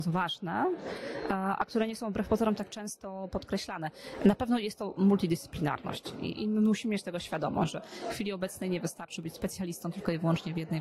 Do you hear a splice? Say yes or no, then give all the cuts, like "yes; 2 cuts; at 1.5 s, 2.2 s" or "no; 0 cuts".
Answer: no; 0 cuts